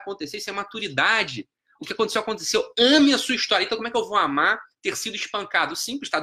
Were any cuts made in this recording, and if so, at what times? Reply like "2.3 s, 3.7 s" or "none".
none